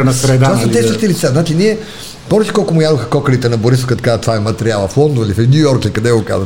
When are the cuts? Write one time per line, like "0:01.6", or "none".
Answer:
none